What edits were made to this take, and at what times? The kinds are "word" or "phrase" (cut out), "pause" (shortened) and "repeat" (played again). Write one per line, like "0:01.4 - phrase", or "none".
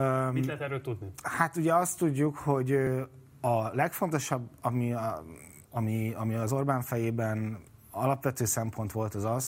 0:05.6 - pause

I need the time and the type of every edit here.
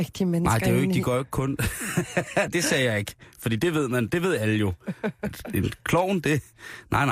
0:02.5 - word

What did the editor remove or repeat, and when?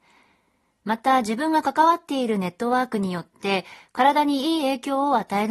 none

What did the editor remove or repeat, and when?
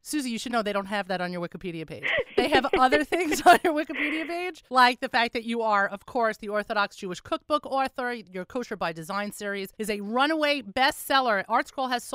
0:04.7 - pause
0:09.7 - pause

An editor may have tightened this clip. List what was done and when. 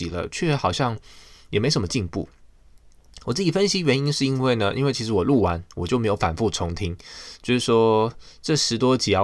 none

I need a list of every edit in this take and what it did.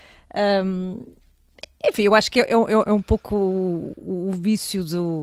none

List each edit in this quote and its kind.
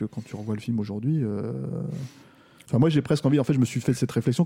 none

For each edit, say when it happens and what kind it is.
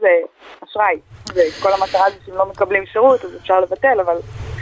none

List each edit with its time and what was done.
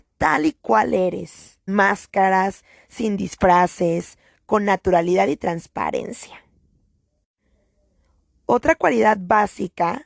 0:01.7 - word

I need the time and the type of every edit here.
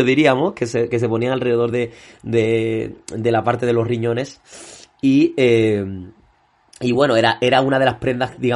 none

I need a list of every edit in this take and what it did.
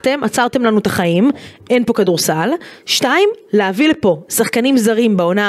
none

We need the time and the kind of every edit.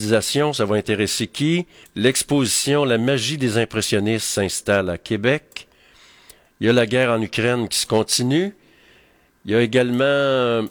0:01.8 - pause

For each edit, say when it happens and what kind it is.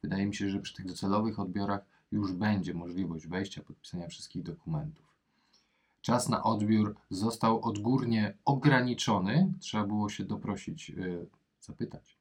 none

